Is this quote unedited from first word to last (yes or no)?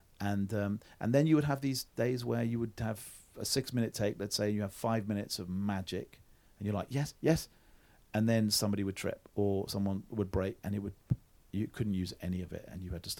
yes